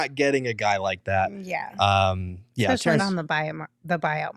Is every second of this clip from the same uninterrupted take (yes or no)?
no